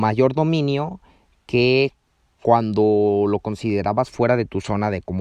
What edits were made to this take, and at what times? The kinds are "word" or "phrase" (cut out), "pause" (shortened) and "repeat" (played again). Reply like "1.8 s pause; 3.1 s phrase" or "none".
none